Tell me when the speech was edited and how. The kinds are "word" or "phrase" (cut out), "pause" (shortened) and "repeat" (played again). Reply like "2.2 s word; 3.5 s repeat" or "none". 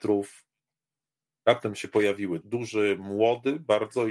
2.4 s word

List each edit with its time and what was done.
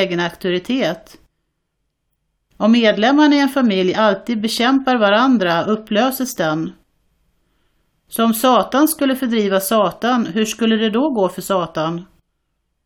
none

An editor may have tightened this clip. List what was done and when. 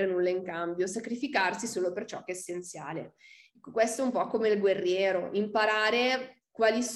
none

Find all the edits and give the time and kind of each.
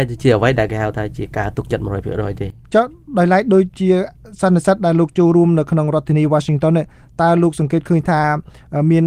none

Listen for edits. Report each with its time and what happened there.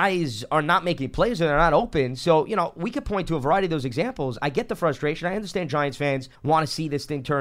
6.3 s pause

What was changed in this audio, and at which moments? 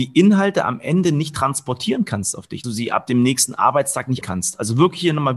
2.6 s word; 4.2 s word

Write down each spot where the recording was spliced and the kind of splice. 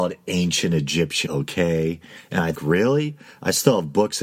1.3 s word; 2.5 s word

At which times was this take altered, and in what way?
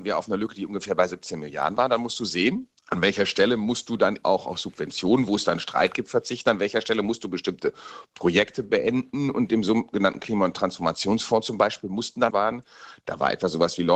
2.8 s pause; 4.2 s word; 12.3 s phrase

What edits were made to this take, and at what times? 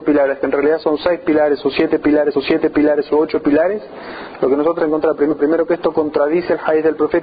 2.3 s repeat; 4.8 s word

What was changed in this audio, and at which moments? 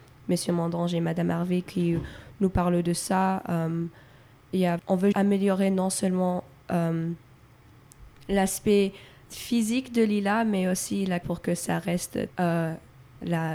4.8 s word; 5.1 s word; 9.2 s word; 11.2 s word; 12.3 s word

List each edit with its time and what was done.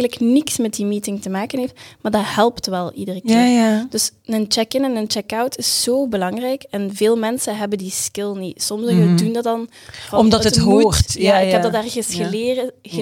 none

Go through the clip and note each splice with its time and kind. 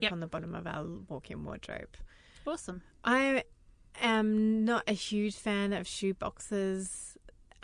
none

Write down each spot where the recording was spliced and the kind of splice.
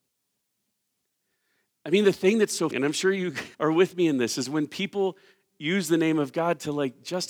2.7 s word; 3.5 s pause

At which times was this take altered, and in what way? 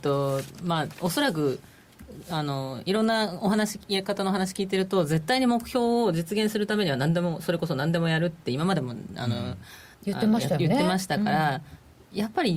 9.9 s pause

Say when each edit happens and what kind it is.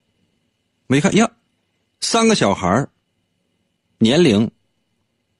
none

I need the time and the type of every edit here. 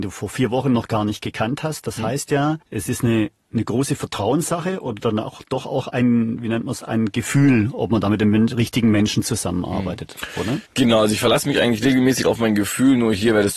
2.6 s pause; 10.7 s pause

